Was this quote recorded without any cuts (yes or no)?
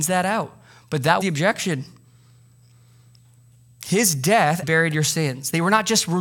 no